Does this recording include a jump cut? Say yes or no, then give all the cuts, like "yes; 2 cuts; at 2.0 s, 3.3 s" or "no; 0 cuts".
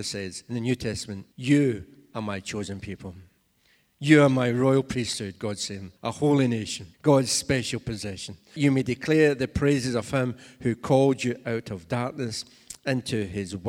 yes; 4 cuts; at 1.3 s, 6.0 s, 6.9 s, 8.6 s